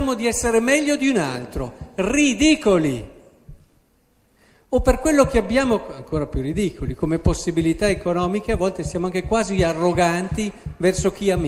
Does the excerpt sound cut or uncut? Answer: uncut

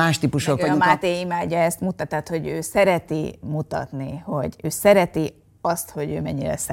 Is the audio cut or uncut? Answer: uncut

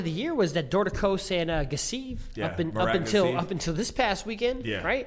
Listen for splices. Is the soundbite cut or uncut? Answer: uncut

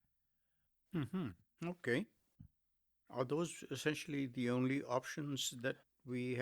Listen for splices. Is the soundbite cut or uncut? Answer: uncut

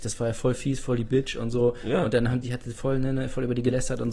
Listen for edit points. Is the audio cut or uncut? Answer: cut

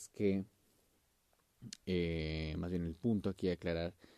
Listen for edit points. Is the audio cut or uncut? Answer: uncut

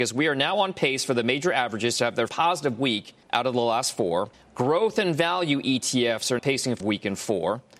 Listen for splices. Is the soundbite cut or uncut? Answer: cut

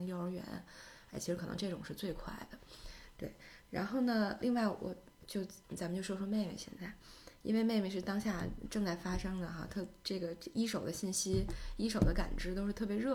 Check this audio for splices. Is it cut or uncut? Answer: cut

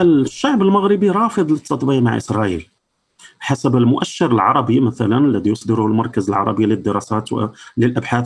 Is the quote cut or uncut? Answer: uncut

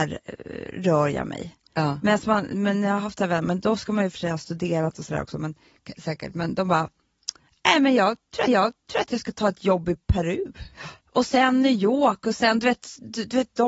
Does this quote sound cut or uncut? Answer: cut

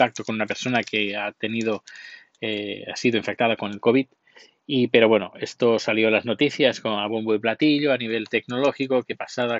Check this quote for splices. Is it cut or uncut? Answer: uncut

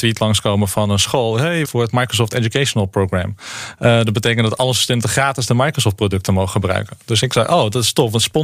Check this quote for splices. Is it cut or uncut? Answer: cut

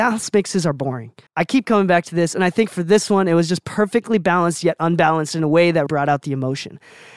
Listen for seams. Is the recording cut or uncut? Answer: cut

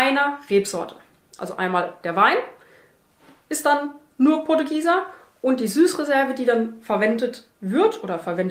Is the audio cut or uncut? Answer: uncut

